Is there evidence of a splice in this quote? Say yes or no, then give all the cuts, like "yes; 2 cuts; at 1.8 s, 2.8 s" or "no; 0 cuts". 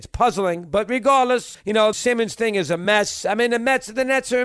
yes; 2 cuts; at 1.5 s, 1.9 s